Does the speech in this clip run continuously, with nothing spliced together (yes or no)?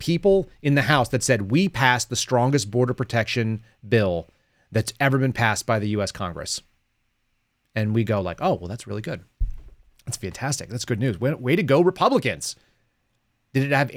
yes